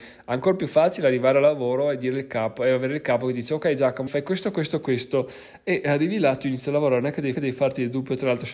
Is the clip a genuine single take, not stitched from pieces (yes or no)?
no